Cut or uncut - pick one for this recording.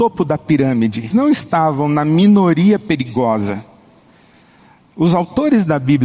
cut